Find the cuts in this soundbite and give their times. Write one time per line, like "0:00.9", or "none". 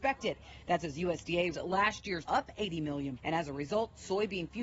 0:01.5
0:02.2
0:03.2